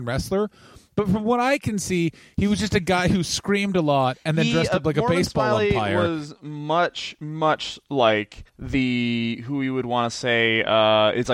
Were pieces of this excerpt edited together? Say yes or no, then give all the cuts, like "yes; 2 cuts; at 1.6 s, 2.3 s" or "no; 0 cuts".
yes; 1 cut; at 8.5 s